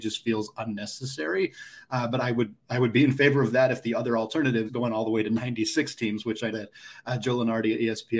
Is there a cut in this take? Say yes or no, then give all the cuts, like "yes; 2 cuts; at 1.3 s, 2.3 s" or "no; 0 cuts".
yes; 2 cuts; at 4.7 s, 6.5 s